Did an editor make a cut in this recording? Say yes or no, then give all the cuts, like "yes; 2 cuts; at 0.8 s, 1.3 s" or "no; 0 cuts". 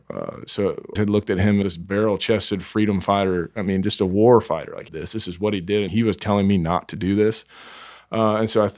yes; 4 cuts; at 1.0 s, 1.6 s, 4.9 s, 5.9 s